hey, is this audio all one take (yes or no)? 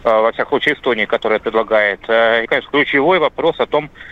no